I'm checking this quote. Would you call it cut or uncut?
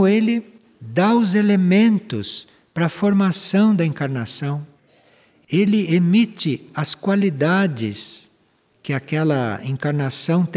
uncut